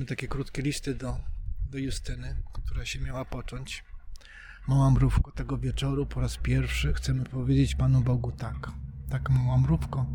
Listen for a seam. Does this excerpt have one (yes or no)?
no